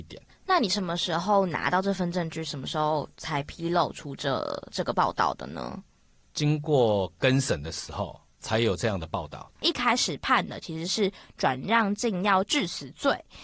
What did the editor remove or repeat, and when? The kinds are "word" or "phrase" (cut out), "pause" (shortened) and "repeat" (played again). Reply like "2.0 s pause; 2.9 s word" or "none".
none